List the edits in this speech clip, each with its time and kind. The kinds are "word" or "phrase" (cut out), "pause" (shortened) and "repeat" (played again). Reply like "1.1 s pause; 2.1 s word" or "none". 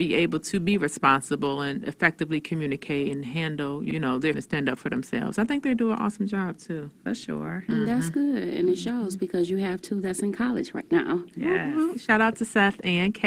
1.8 s word; 4.3 s word